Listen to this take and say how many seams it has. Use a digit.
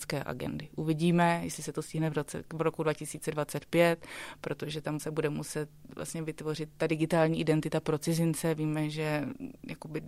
1